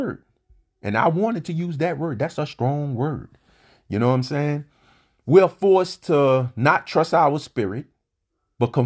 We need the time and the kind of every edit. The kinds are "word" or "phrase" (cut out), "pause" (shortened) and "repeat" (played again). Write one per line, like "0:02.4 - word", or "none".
none